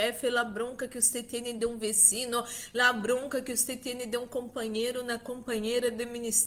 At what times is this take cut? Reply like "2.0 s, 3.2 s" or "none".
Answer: none